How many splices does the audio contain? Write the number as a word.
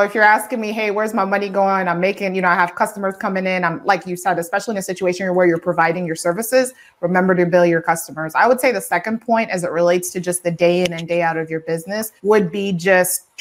one